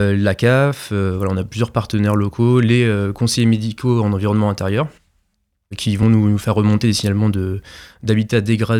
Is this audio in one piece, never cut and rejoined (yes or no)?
yes